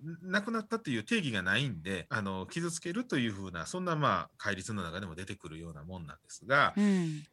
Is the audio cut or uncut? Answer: cut